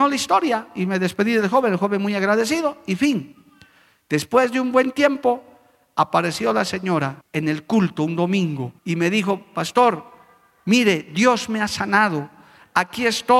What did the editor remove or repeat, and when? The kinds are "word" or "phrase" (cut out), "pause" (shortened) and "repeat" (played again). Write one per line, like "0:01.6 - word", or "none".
0:07.2 - pause
0:08.8 - pause